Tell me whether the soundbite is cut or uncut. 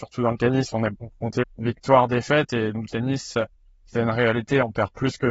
cut